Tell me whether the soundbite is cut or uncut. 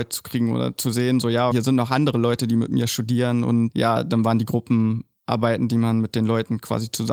cut